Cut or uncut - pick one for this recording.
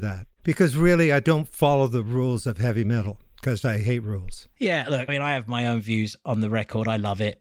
cut